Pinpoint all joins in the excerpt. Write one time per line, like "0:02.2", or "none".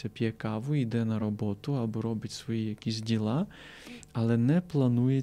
none